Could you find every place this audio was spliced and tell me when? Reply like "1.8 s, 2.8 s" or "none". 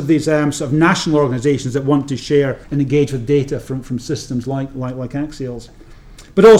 2.6 s